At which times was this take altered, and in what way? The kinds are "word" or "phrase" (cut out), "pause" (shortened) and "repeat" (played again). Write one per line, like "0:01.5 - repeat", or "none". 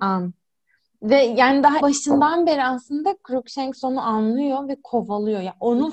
0:01.8 - word